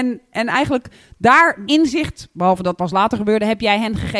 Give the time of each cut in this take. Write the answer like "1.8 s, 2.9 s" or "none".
1.7 s, 2.8 s